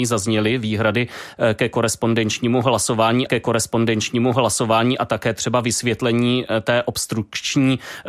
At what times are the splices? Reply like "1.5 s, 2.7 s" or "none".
3.3 s